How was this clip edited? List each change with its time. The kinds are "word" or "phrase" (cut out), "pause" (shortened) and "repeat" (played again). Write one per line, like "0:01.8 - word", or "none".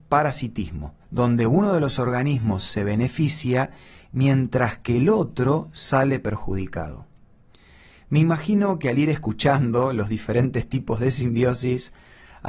0:01.0 - pause